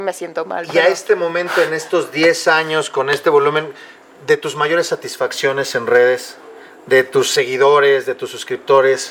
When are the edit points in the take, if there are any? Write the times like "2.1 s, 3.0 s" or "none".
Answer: none